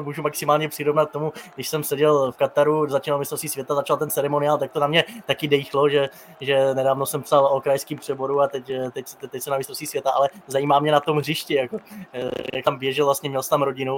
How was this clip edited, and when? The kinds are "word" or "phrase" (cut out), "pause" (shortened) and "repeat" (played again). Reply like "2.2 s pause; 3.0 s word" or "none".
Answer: none

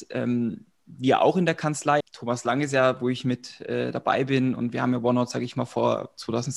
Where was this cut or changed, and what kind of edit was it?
2.0 s word

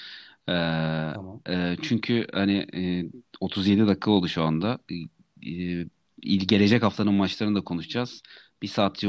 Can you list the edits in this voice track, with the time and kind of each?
none

